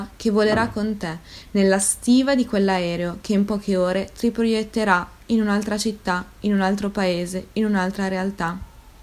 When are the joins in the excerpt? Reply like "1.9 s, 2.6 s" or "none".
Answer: none